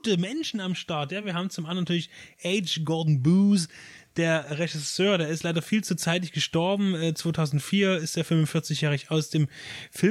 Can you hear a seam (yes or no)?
no